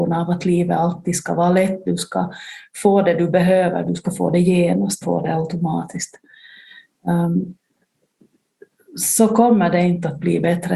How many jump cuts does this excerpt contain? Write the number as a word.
one